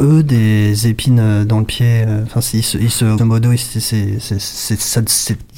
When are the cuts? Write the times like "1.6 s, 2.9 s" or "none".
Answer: 3.2 s